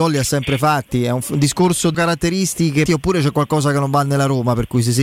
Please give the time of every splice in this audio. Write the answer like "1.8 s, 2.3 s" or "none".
1.9 s, 2.9 s